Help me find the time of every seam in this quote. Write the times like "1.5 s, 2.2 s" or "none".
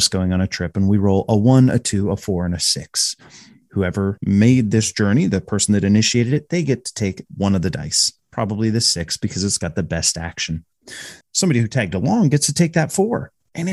8.2 s, 11.2 s